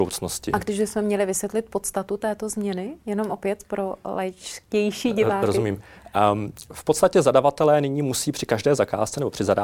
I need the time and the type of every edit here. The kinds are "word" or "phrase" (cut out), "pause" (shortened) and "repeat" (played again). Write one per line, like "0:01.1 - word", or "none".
none